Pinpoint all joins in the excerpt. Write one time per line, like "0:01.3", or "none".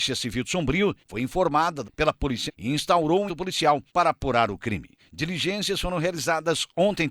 0:01.0
0:01.8
0:02.5
0:03.3
0:03.9

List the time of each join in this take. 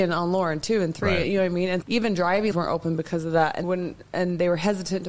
0:01.8
0:02.5
0:03.6

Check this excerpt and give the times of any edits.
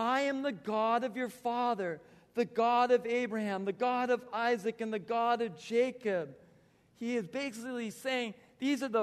none

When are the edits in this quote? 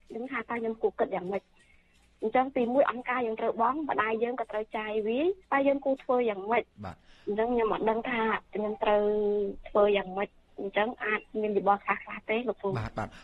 0:05.4

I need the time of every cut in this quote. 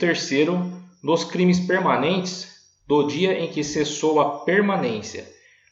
none

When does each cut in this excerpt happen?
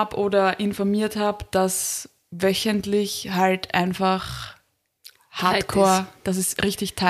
none

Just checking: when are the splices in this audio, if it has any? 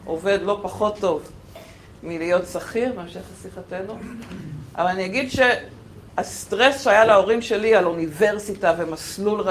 none

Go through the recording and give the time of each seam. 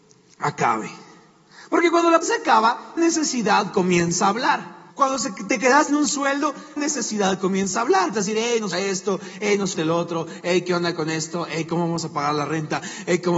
0:02.2
0:03.0
0:04.9
0:05.9
0:06.8
0:08.1
0:08.7
0:09.7

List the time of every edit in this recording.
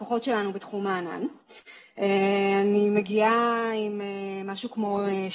none

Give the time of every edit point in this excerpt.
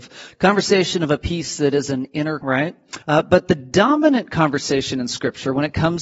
0:02.4
0:03.0

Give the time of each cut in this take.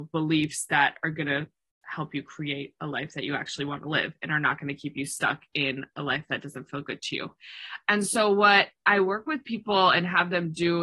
none

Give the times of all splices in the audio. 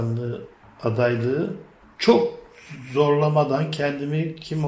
none

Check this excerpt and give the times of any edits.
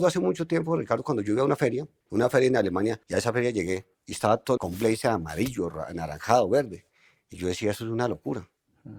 0:02.0
0:03.0
0:03.9
0:04.6

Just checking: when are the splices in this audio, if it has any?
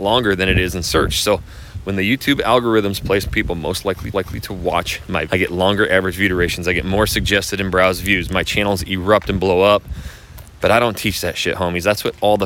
0:03.2
0:04.1
0:05.3

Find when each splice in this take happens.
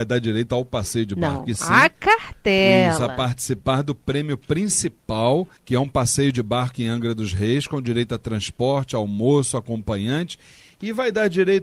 0:05.6

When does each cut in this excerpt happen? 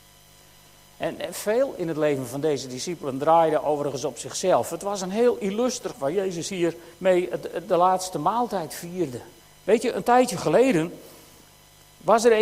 0:05.9
0:06.9
0:09.4

